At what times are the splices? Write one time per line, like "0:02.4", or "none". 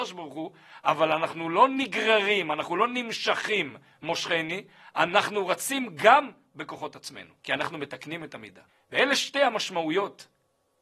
0:07.4
0:08.7

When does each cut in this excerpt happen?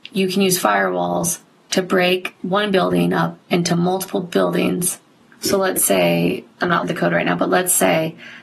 0:02.4
0:05.2
0:06.5
0:06.8

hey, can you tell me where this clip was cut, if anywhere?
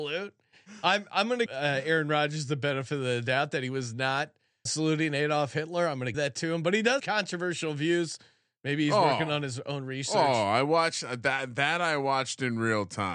0:01.5
0:04.7
0:06.1
0:07.0

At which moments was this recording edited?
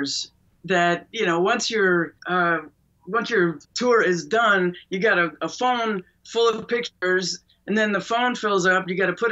0:02.2
0:03.6

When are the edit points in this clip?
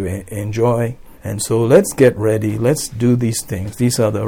0:01.1

